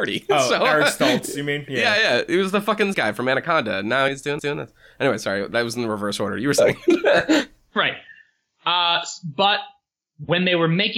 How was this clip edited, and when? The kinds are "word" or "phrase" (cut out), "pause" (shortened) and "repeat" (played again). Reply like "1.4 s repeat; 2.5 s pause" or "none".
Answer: 2.9 s word; 4.1 s word; 4.4 s repeat